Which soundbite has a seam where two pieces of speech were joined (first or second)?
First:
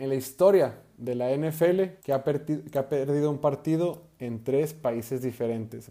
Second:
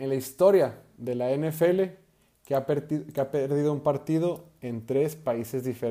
first